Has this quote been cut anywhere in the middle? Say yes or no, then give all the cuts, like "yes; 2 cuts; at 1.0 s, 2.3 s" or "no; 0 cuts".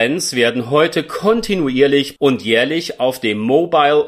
yes; 1 cut; at 2.2 s